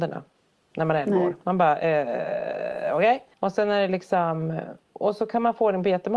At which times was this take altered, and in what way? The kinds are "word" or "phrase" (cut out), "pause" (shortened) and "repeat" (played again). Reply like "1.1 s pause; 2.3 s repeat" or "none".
3.3 s pause

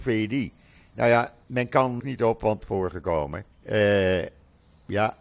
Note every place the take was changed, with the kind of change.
1.4 s pause; 2.0 s phrase; 2.6 s phrase; 3.5 s pause

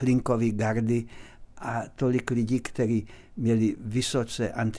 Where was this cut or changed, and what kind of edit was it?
none

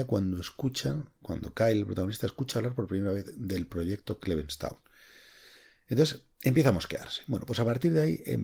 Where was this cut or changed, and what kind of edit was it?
6.3 s pause

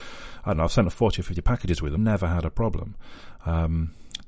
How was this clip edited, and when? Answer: 2.0 s word

